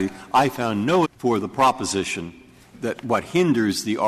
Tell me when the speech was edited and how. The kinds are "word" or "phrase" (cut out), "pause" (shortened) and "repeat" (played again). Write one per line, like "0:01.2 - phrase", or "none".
0:01.0 - word